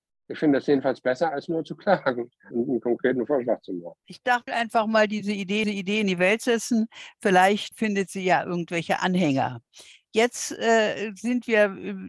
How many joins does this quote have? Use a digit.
4